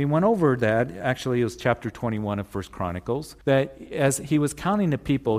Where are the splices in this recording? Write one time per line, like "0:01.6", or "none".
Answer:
0:03.4